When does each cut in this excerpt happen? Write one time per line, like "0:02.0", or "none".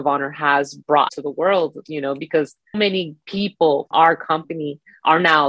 0:01.1
0:02.7
0:03.9